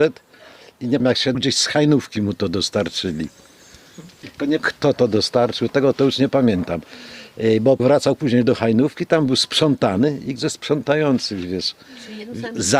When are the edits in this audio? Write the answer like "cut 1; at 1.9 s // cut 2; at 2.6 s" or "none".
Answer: cut 1; at 1.0 s // cut 2; at 1.3 s // cut 3; at 4.6 s // cut 4; at 5.7 s // cut 5; at 7.8 s // cut 6; at 10.4 s